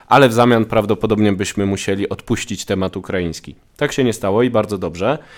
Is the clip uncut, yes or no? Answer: yes